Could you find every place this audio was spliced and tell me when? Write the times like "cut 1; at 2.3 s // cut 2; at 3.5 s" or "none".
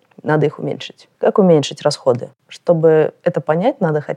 cut 1; at 1.1 s // cut 2; at 2.4 s